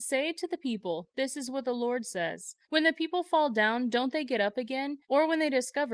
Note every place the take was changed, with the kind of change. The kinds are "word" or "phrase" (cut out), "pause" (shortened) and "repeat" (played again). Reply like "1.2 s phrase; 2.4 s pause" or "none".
2.6 s pause; 5.0 s pause